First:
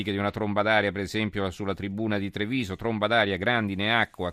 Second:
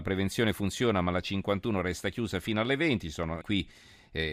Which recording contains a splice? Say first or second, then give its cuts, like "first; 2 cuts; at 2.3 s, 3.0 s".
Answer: second; 1 cut; at 3.4 s